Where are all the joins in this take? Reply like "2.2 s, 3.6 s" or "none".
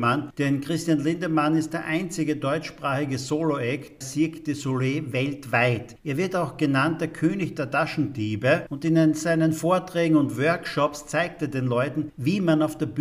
4.0 s

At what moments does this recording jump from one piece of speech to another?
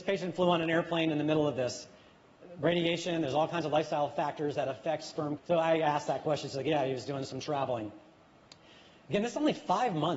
none

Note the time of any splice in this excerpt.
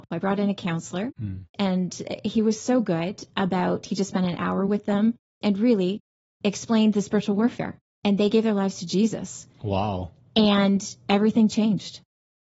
none

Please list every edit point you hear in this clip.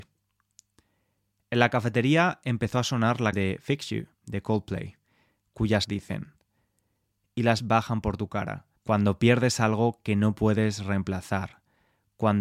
3.3 s, 4.1 s, 5.8 s, 7.6 s, 8.8 s

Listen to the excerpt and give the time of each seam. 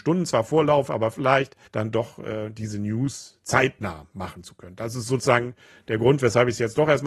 1.7 s

